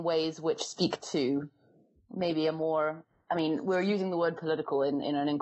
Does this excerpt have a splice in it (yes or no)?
no